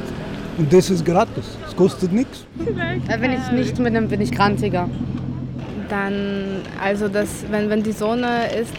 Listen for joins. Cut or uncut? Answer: cut